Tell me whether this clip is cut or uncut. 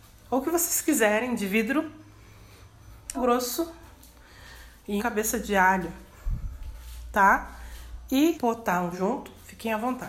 cut